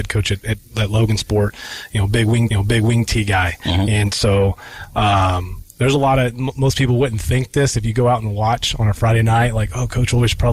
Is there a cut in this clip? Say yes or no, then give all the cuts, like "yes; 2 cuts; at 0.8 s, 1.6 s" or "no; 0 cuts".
yes; 1 cut; at 2.5 s